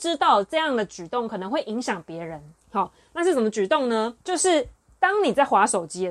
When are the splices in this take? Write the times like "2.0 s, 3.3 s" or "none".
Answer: 2.6 s, 4.2 s, 4.8 s